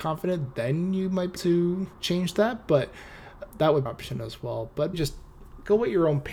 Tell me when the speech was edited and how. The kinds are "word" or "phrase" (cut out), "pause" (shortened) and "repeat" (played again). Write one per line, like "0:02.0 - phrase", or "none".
0:01.4 - word
0:01.9 - pause
0:03.5 - word
0:03.9 - phrase
0:04.9 - word